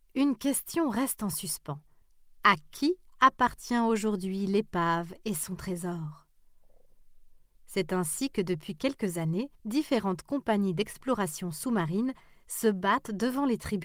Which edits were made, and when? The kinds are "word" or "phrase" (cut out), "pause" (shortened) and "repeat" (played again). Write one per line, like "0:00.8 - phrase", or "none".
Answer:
0:02.0 - pause
0:09.5 - pause